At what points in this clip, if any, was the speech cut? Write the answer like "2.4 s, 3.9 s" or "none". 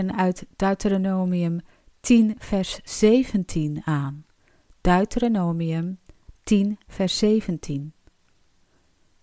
none